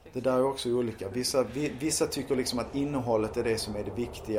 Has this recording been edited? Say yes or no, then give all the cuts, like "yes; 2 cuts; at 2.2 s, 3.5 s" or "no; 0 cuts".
no; 0 cuts